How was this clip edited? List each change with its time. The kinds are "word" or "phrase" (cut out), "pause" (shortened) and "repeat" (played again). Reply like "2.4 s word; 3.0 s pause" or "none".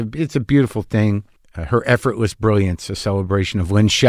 none